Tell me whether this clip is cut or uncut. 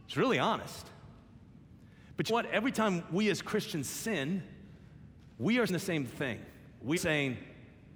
cut